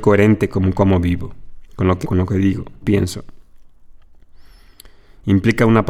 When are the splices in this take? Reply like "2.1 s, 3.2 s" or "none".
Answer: 2.0 s, 2.8 s